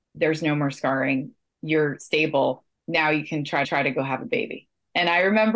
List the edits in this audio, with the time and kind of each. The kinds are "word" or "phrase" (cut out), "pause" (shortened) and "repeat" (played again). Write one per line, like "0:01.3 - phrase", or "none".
0:03.6 - repeat